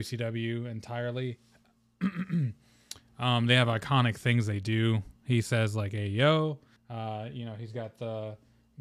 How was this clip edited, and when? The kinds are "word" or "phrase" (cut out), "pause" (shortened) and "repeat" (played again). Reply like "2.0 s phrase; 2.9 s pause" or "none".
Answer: 6.8 s pause